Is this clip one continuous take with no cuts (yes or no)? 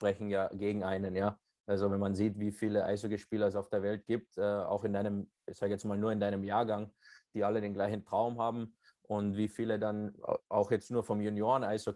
yes